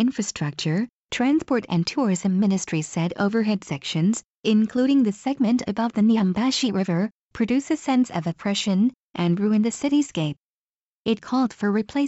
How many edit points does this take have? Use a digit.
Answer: 0